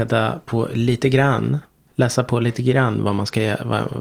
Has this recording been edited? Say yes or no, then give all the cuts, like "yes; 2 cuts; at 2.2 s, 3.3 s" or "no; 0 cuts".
no; 0 cuts